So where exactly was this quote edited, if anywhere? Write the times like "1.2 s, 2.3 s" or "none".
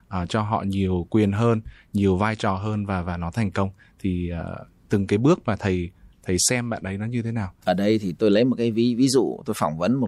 none